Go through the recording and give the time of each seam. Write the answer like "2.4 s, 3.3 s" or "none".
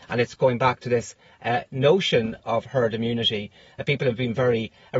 2.4 s